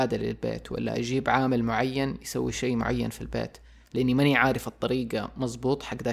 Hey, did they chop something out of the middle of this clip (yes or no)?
no